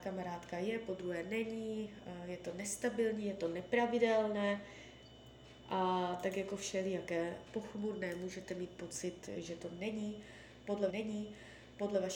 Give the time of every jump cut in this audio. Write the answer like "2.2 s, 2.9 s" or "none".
10.9 s